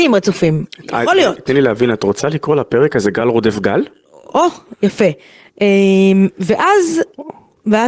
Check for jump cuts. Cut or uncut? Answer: uncut